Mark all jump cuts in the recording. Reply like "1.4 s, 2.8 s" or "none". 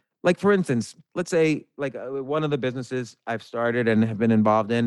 1.0 s

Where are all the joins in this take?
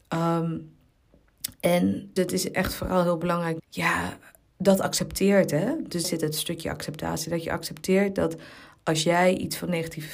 2.2 s, 3.6 s, 6.0 s

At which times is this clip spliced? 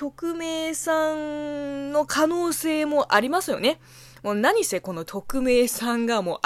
5.1 s

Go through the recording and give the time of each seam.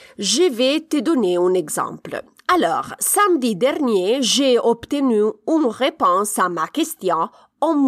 none

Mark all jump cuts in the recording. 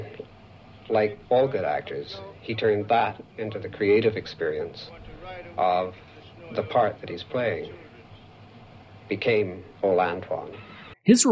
1.2 s, 9.7 s

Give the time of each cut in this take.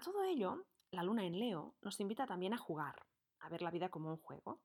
none

